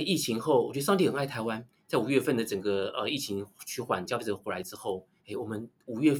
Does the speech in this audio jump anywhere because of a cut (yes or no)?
yes